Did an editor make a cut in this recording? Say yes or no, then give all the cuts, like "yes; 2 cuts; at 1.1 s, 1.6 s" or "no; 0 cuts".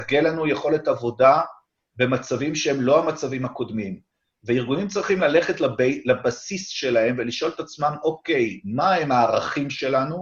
no; 0 cuts